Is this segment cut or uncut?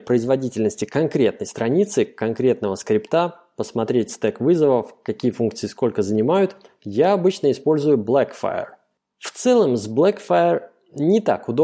uncut